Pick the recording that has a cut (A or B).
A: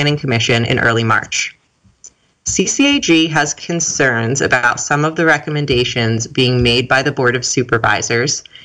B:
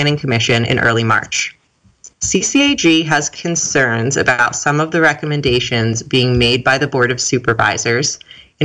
B